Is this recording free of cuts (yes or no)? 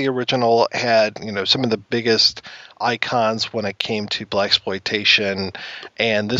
yes